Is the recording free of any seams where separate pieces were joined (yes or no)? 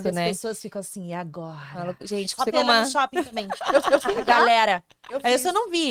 no